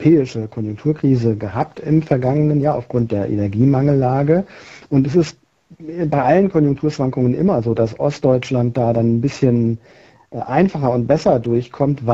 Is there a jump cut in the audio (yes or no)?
no